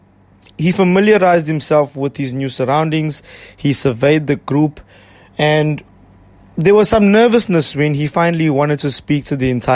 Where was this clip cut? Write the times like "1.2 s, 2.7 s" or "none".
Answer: none